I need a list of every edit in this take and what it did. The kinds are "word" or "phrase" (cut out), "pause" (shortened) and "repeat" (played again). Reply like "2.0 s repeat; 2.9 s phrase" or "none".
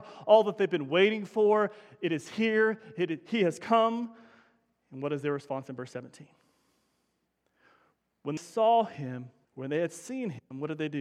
8.4 s word; 9.4 s pause